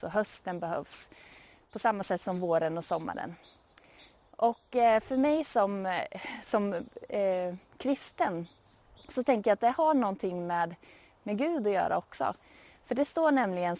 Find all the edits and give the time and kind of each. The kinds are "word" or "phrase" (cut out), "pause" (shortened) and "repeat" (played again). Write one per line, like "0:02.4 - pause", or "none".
none